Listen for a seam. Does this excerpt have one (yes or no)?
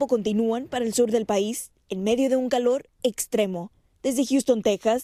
no